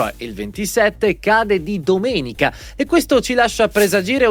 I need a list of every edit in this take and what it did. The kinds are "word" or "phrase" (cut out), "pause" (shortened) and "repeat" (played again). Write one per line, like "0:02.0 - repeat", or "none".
none